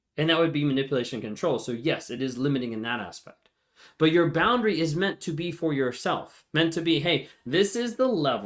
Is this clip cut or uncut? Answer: uncut